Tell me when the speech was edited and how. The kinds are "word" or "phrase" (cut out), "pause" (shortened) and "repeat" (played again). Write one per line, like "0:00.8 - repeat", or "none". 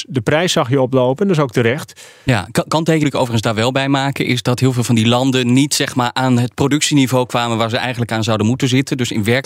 0:03.0 - word